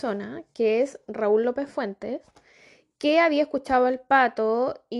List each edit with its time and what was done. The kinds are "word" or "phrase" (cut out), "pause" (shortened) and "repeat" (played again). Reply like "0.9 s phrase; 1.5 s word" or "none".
none